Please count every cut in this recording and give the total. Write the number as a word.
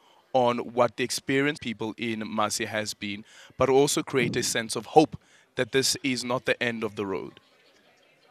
one